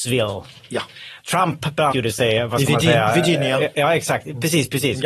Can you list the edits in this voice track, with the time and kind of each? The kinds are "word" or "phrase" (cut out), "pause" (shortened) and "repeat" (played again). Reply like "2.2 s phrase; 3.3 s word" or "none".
1.2 s word; 1.9 s word